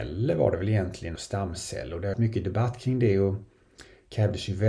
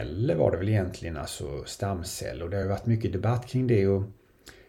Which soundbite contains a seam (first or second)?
first